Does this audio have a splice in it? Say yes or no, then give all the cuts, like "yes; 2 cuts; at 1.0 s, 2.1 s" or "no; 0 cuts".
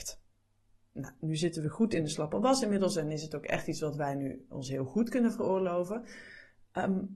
no; 0 cuts